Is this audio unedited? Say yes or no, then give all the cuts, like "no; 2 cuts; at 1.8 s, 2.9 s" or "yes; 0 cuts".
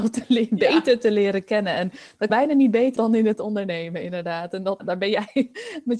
no; 3 cuts; at 2.3 s, 3.0 s, 4.8 s